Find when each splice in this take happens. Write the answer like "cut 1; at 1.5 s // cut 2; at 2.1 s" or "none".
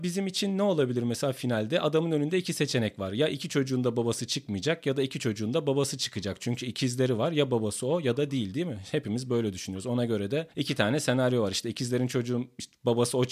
cut 1; at 10.5 s